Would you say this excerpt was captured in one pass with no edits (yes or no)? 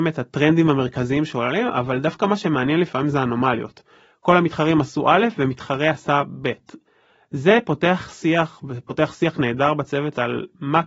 yes